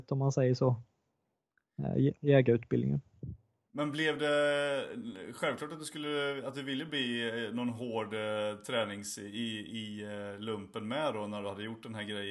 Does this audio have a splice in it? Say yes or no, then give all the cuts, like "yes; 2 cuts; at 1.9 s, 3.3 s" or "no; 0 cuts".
no; 0 cuts